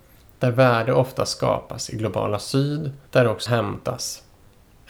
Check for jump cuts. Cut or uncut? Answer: cut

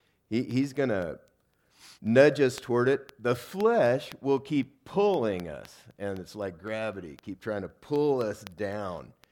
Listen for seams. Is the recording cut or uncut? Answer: cut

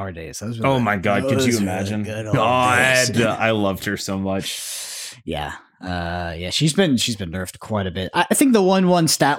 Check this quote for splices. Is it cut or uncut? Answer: uncut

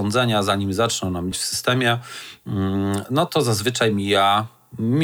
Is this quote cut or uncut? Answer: cut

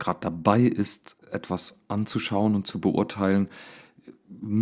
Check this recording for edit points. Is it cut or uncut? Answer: cut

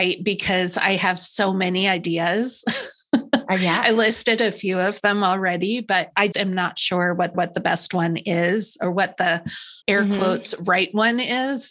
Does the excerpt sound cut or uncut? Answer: cut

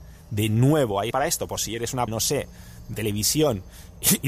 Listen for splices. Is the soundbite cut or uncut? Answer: cut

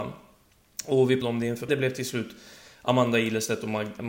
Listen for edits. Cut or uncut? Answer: cut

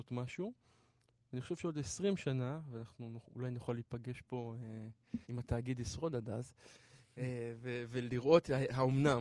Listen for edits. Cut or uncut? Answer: cut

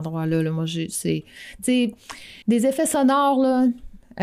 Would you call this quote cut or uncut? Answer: cut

